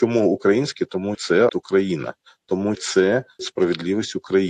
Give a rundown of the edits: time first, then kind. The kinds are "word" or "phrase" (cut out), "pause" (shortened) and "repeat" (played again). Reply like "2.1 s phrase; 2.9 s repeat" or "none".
1.1 s word; 1.5 s word; 2.7 s word; 3.4 s word